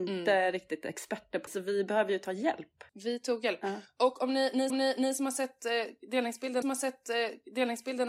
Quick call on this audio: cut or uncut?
cut